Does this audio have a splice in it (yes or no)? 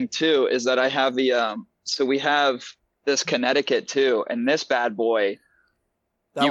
yes